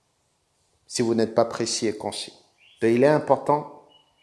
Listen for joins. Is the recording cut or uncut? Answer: uncut